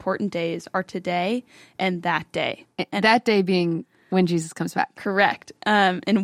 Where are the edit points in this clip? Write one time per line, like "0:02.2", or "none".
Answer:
none